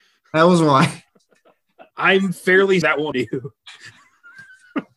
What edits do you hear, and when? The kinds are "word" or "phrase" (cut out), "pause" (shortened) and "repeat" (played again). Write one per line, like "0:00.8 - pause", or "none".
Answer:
0:01.9 - pause
0:02.8 - word
0:03.1 - word